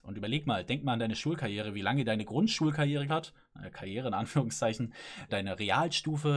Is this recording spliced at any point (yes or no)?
yes